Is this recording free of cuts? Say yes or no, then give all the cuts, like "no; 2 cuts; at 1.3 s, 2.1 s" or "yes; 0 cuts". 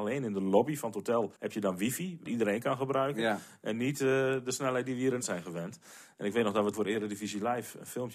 no; 4 cuts; at 1.4 s, 2.3 s, 5.2 s, 6.7 s